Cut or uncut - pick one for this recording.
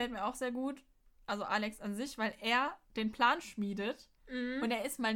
uncut